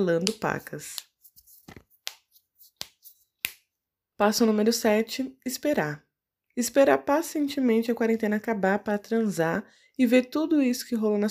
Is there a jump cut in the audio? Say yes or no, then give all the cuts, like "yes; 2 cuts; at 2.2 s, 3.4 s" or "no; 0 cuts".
no; 0 cuts